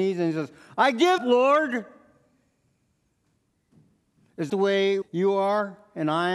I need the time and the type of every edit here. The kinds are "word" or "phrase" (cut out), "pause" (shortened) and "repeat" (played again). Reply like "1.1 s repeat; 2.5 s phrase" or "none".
1.2 s word; 4.5 s word; 5.0 s word